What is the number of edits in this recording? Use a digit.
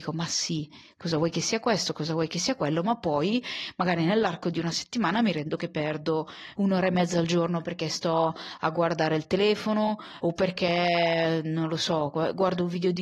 3